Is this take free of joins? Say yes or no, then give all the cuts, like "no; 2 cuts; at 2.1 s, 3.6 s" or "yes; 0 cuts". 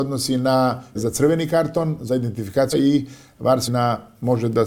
no; 3 cuts; at 0.9 s, 2.7 s, 3.7 s